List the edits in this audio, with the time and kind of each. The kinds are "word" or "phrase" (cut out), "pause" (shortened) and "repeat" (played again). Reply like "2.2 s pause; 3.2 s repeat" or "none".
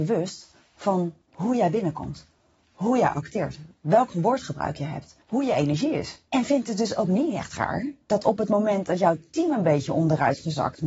1.2 s pause; 5.2 s pause; 6.3 s pause; 8.0 s pause